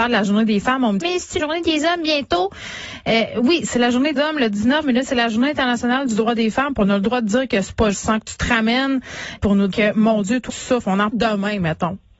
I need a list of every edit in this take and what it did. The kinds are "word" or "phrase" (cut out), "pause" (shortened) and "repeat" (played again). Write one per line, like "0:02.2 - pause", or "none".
0:01.0 - word
0:01.4 - word
0:04.2 - word
0:04.8 - word
0:07.9 - word
0:09.4 - word
0:09.7 - word
0:10.5 - word
0:11.1 - word